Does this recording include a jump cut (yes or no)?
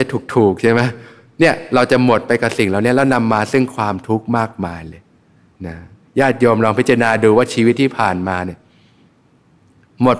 no